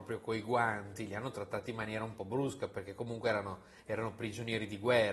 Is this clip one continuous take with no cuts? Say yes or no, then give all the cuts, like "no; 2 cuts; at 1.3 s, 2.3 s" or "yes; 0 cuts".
yes; 0 cuts